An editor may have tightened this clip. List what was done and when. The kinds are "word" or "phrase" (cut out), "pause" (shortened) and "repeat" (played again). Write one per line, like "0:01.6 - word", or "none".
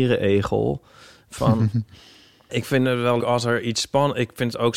0:02.5 - word
0:03.2 - word